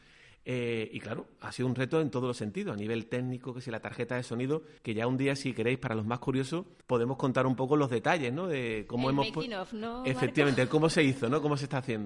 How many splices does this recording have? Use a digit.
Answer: 2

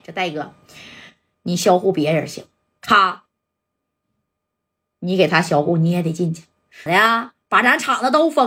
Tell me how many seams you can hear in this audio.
1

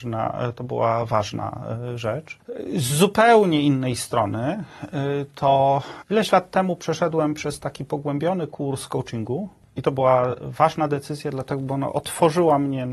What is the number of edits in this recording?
0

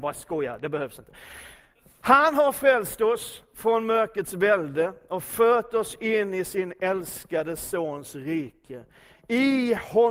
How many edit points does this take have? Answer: 0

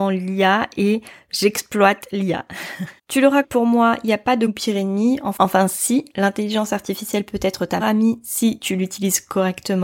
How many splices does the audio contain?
4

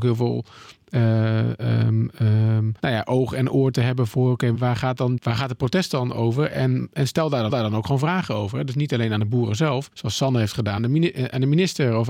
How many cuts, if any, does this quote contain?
6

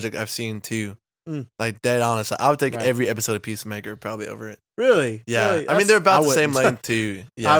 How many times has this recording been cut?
0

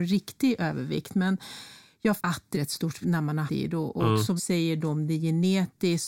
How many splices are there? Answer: 5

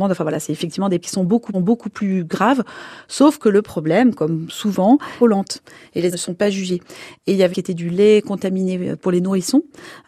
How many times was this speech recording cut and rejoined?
5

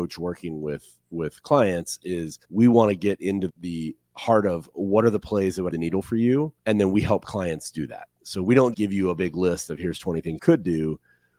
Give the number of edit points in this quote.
6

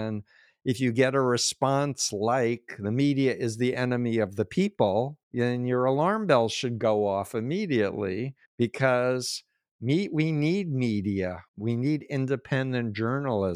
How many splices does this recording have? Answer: 3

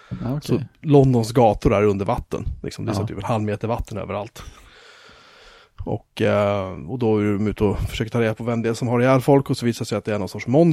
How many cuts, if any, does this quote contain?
0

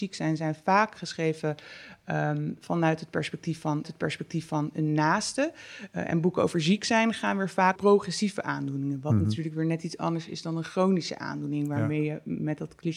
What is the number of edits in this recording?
2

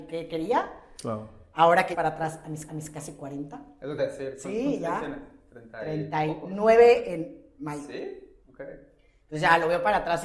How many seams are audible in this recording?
4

